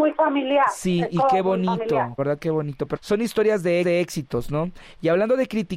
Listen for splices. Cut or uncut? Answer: cut